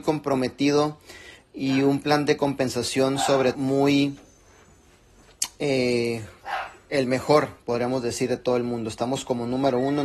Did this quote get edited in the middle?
yes; 1 cut; at 3.5 s

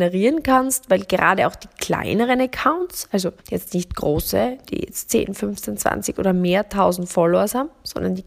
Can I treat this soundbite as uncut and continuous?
no; 1 cut; at 3.4 s

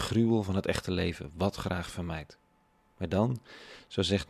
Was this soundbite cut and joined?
no; 0 cuts

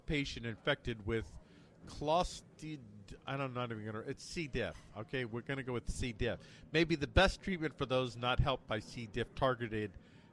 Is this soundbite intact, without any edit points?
yes; 0 cuts

